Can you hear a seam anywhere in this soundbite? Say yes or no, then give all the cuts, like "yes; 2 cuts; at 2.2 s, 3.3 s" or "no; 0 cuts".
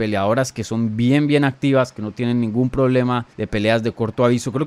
yes; 1 cut; at 3.3 s